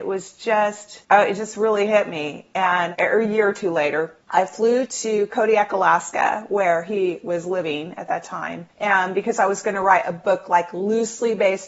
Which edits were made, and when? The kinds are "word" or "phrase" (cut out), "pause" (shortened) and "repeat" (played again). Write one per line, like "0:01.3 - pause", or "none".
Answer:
0:01.0 - pause
0:04.2 - pause
0:08.7 - pause